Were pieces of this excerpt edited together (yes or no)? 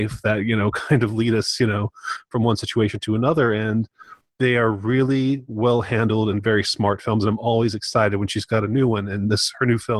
no